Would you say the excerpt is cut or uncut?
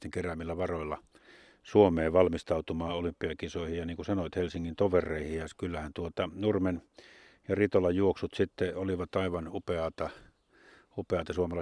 uncut